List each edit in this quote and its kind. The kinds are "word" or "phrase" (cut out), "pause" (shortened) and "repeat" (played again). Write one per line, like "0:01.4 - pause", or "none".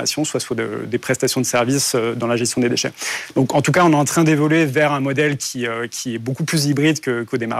none